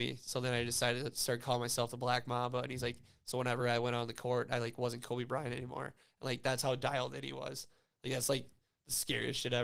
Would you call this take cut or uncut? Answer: uncut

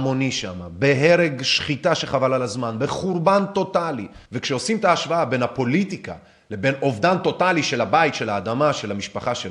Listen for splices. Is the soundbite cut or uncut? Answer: cut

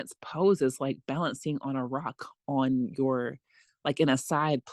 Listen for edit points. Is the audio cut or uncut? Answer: uncut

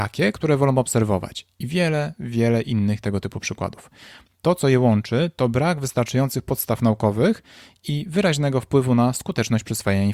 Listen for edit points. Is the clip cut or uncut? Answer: uncut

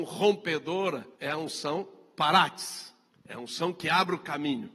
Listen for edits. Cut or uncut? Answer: cut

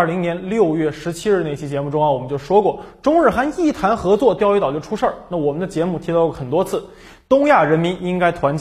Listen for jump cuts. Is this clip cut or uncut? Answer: uncut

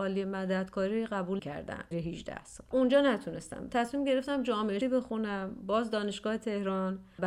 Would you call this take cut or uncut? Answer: cut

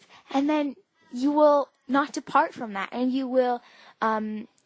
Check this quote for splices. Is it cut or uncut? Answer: uncut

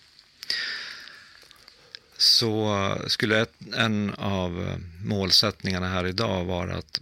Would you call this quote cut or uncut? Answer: uncut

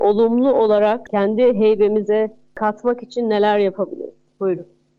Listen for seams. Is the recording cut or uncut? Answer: uncut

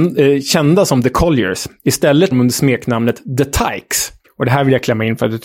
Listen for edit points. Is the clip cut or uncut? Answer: cut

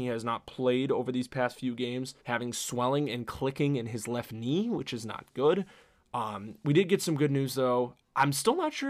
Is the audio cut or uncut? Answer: cut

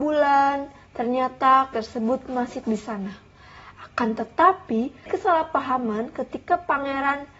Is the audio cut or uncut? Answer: cut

